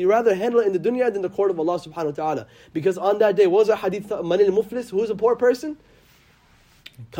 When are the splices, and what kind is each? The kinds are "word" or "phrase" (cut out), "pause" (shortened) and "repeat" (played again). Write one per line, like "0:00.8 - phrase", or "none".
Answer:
none